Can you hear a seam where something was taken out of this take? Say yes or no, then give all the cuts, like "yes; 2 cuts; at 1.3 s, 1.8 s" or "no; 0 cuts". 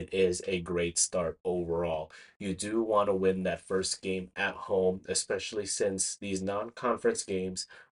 no; 0 cuts